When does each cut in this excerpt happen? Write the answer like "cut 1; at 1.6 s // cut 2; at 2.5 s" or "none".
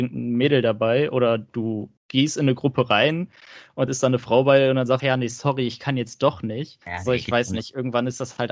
cut 1; at 2.0 s // cut 2; at 3.9 s // cut 3; at 5.0 s // cut 4; at 6.8 s